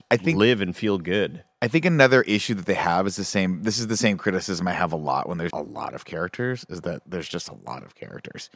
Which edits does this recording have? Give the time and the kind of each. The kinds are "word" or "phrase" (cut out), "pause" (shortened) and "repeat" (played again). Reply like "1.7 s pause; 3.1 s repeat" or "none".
5.5 s word

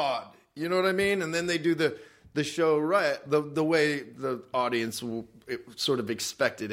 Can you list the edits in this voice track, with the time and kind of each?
none

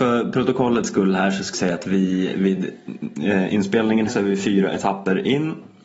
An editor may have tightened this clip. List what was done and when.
1.5 s word; 4.1 s word

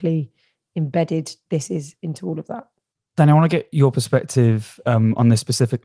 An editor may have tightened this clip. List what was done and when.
none

